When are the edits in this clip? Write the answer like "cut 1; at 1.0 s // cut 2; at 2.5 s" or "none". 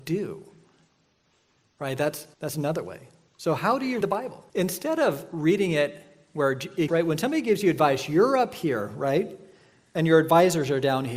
cut 1; at 2.3 s // cut 2; at 4.0 s // cut 3; at 4.5 s // cut 4; at 6.9 s